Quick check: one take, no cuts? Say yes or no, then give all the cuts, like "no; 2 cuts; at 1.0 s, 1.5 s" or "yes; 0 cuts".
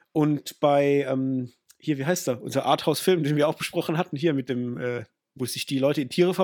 yes; 0 cuts